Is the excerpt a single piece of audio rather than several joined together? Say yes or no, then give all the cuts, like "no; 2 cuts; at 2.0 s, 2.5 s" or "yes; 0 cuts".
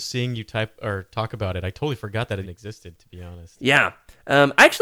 no; 1 cut; at 2.4 s